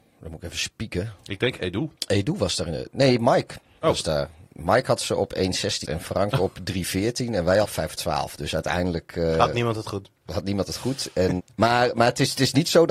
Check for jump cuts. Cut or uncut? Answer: cut